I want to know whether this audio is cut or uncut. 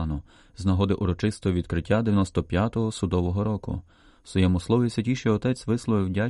uncut